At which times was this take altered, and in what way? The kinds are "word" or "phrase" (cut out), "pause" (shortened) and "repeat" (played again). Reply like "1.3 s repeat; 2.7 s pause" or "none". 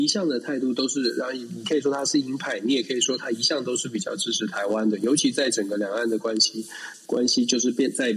none